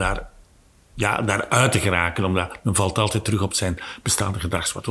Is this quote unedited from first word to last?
yes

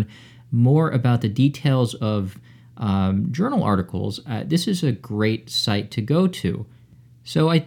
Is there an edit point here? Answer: no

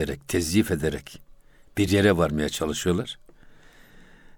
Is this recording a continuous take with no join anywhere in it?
yes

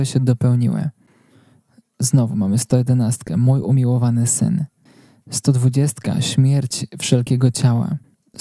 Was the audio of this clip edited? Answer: no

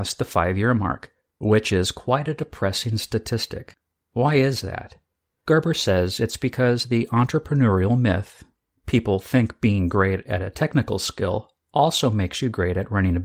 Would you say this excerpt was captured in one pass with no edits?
yes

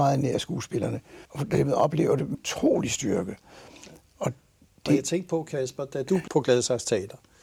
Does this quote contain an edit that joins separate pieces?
yes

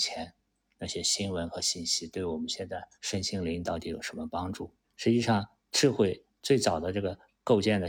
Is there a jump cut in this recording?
yes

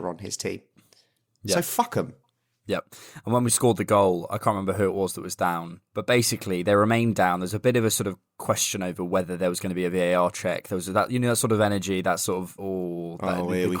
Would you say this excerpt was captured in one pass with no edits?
no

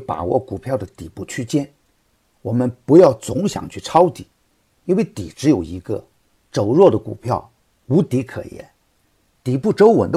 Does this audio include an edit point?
no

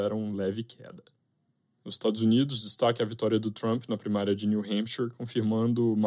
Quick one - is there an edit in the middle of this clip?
no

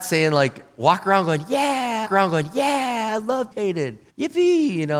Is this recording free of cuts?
no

